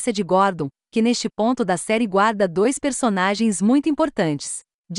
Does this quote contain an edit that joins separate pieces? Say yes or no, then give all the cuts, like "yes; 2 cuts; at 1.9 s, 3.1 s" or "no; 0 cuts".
no; 0 cuts